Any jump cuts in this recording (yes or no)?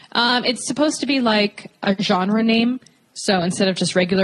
no